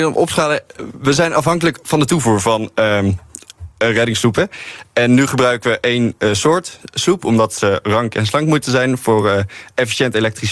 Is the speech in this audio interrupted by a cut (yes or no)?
no